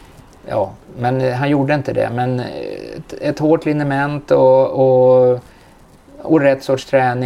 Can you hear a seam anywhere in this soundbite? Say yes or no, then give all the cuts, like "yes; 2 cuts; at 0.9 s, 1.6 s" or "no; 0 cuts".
no; 0 cuts